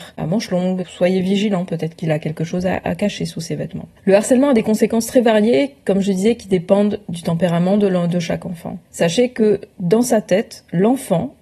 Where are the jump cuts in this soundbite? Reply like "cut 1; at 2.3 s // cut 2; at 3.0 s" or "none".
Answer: cut 1; at 4.0 s // cut 2; at 8.9 s